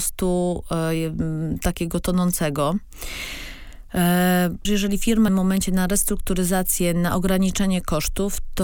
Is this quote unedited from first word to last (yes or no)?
no